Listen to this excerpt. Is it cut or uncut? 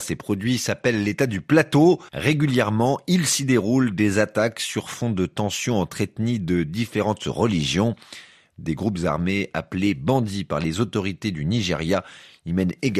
cut